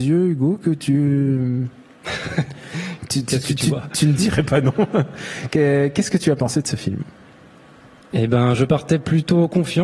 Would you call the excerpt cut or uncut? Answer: uncut